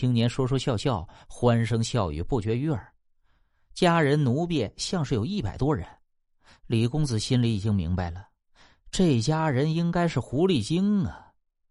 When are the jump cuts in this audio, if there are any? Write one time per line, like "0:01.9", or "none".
none

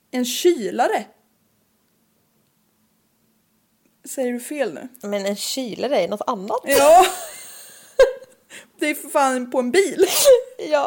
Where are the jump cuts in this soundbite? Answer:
none

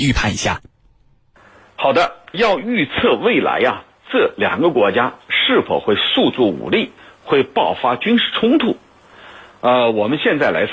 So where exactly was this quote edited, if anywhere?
0:02.3

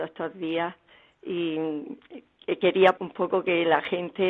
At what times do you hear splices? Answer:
0:03.0

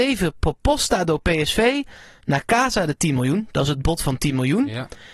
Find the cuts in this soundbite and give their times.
none

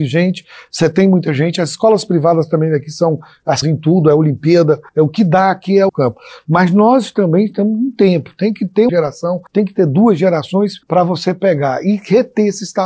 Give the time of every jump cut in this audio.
0:03.6
0:04.9
0:05.9
0:08.9
0:09.5
0:10.8

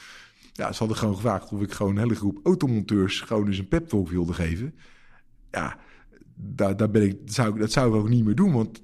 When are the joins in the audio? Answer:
none

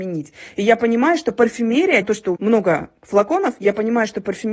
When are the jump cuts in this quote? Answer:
0:02.0
0:02.4

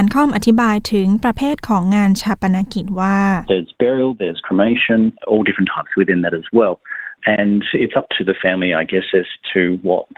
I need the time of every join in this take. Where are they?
0:05.2

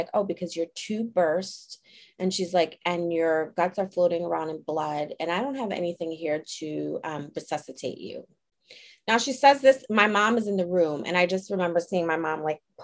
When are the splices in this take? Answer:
none

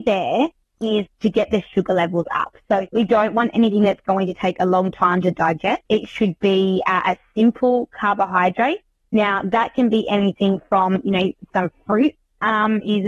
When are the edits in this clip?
0:02.9
0:05.8
0:11.5

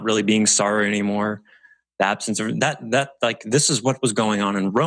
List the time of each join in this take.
none

